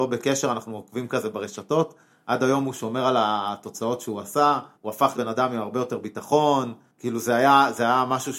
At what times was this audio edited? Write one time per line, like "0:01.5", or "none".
0:04.7
0:05.1